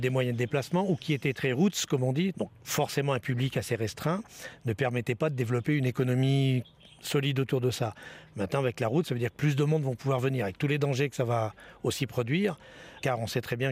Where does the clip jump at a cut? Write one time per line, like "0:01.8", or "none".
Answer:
none